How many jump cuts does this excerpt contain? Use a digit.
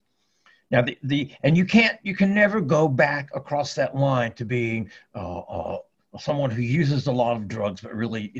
0